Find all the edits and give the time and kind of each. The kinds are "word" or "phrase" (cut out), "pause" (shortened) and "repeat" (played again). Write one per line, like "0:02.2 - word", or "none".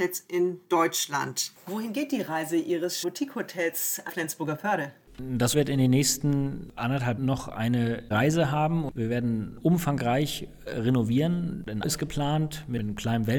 0:03.0 - word
0:04.1 - word
0:05.5 - word
0:07.2 - word
0:08.1 - word
0:11.8 - word